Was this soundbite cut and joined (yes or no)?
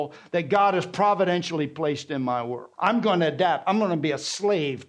yes